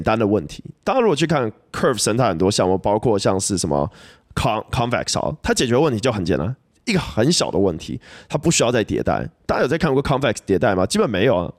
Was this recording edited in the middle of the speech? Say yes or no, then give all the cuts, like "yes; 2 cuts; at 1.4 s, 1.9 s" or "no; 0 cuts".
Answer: no; 0 cuts